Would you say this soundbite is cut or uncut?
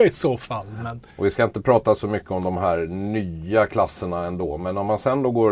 cut